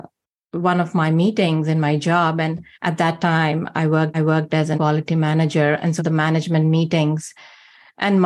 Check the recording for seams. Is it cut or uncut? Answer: cut